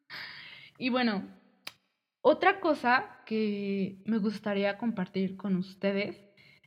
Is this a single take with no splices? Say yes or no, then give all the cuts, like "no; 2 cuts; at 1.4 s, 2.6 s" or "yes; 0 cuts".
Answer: yes; 0 cuts